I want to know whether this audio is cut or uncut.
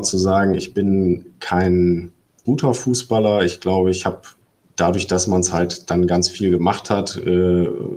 cut